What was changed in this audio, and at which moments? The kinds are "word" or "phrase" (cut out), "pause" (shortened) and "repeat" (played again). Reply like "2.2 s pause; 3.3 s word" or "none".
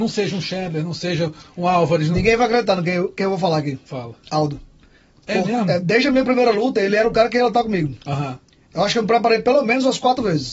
none